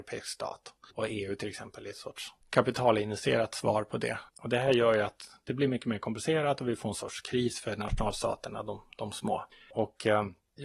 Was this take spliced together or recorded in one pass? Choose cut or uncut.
cut